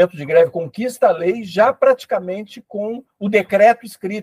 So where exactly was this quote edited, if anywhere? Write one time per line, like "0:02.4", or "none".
none